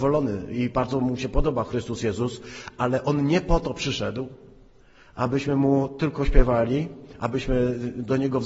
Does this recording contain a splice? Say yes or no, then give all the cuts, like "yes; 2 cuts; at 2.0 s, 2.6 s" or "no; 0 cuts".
no; 0 cuts